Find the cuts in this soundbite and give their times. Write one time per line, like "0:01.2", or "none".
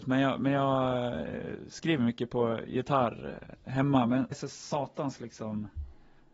0:04.3